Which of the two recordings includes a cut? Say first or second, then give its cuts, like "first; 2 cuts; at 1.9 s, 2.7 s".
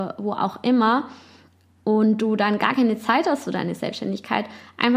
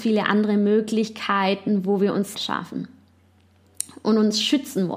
second; 1 cut; at 2.3 s